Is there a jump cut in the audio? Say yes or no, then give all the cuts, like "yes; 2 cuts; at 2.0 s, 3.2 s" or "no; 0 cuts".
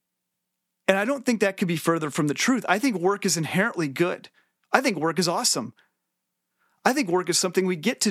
no; 0 cuts